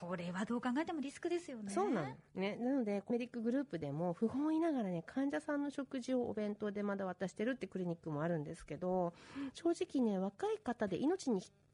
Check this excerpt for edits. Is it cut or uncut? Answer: cut